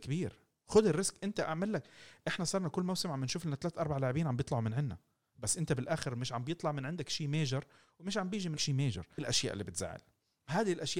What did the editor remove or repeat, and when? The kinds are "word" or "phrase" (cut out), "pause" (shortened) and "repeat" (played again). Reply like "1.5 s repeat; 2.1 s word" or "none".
8.6 s word; 9.2 s word